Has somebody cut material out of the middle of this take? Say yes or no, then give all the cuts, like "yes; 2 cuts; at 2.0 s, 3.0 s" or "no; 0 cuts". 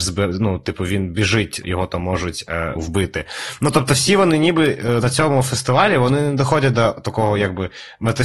yes; 2 cuts; at 1.6 s, 2.8 s